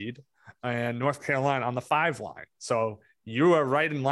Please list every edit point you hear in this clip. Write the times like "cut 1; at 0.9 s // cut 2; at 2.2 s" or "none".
none